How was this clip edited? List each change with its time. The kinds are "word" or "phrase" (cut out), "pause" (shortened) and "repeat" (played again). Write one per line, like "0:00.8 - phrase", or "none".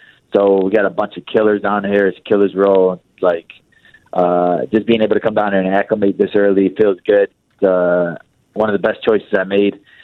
none